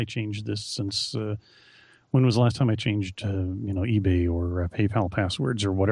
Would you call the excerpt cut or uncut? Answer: uncut